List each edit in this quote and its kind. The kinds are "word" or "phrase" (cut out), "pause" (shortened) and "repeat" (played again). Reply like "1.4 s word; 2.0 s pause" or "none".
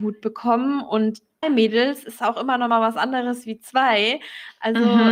1.4 s word